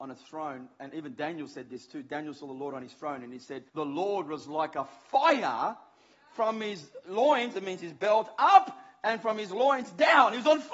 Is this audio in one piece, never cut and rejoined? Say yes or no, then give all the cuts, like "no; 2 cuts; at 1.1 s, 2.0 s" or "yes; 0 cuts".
no; 1 cut; at 3.7 s